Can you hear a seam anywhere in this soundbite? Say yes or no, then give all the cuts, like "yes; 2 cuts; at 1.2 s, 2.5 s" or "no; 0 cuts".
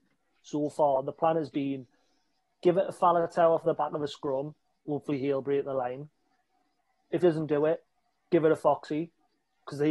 yes; 1 cut; at 7.2 s